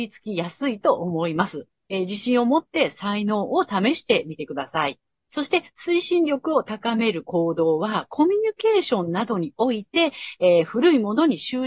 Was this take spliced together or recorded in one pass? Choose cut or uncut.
cut